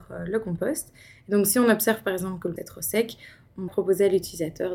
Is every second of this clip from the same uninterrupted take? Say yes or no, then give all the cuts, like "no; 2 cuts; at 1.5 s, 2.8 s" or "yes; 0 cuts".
no; 2 cuts; at 2.6 s, 3.7 s